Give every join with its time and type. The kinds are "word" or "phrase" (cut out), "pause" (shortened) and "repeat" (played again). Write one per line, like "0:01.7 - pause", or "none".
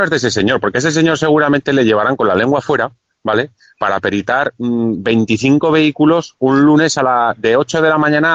none